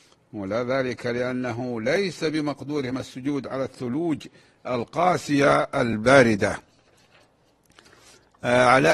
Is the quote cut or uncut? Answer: uncut